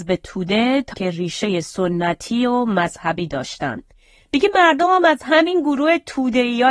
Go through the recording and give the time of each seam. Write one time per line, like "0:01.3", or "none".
0:00.9